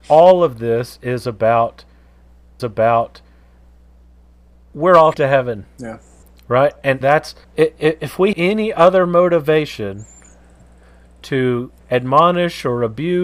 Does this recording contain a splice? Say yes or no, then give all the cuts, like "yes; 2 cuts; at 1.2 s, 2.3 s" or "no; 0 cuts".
yes; 7 cuts; at 2.6 s, 5.1 s, 6.2 s, 7.0 s, 7.4 s, 8.3 s, 11.8 s